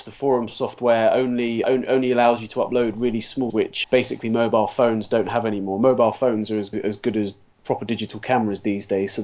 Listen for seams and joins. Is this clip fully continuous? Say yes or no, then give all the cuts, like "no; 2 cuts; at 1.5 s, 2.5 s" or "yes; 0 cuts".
no; 4 cuts; at 1.6 s, 3.5 s, 3.8 s, 6.7 s